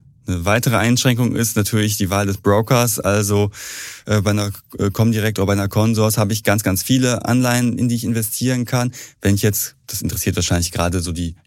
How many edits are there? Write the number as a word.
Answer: zero